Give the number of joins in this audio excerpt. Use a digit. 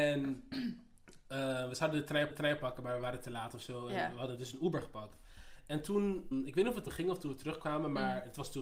3